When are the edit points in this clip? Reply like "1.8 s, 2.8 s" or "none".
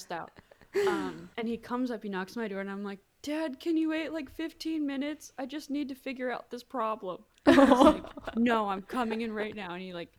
1.3 s